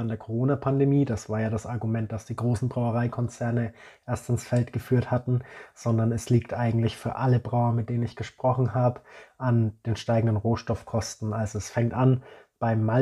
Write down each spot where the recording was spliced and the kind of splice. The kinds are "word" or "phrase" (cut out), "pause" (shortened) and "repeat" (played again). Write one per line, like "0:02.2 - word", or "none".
none